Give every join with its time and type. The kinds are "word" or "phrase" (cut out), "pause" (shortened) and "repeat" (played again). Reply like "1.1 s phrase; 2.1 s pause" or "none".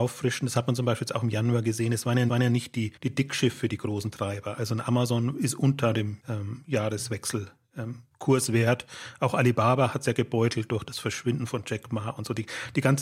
2.3 s repeat; 3.0 s pause; 6.2 s pause; 8.1 s word